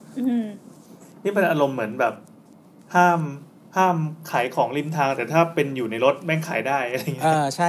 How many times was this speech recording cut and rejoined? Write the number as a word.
zero